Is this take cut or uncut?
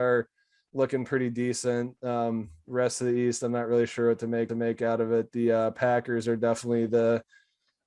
cut